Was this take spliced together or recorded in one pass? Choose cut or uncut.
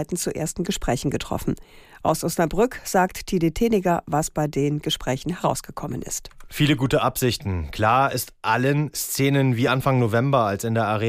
uncut